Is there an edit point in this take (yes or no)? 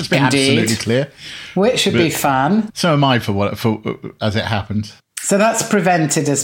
no